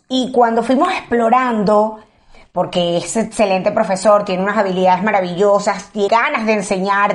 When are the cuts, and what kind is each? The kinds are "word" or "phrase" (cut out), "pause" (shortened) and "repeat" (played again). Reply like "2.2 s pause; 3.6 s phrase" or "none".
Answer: 6.1 s word